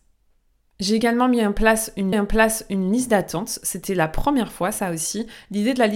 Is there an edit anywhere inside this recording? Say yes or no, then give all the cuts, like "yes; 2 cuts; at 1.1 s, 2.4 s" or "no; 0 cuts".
yes; 1 cut; at 2.1 s